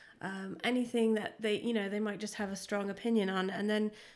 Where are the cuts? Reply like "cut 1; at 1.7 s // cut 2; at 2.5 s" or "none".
none